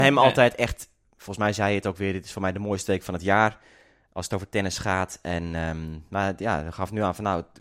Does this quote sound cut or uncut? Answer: uncut